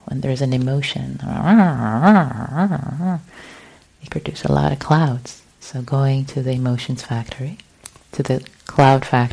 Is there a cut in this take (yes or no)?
yes